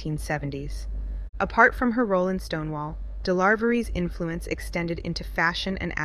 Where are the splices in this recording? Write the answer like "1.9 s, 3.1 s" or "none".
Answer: none